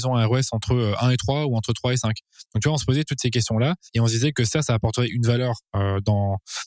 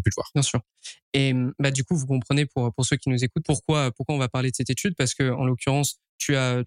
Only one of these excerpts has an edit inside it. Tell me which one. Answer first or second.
first